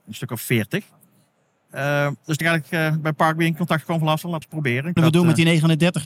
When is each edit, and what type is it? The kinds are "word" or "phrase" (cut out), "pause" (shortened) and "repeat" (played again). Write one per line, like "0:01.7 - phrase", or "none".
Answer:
0:02.4 - word
0:04.4 - phrase
0:05.0 - phrase